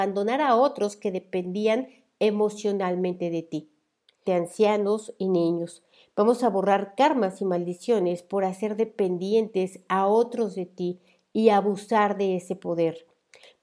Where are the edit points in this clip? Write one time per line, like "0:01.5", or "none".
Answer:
0:04.2